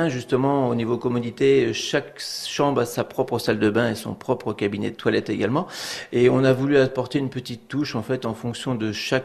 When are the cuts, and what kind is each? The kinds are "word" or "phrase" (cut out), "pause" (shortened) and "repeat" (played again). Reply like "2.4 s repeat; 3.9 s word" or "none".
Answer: none